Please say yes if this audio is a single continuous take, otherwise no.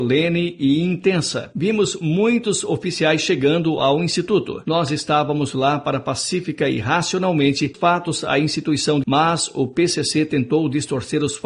no